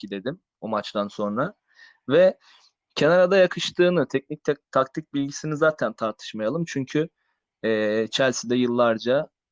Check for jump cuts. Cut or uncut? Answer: uncut